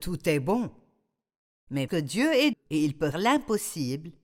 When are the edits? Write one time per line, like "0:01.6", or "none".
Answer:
0:01.9
0:02.5
0:03.1